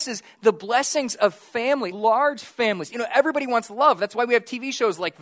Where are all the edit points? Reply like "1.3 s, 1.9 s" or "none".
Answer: 1.9 s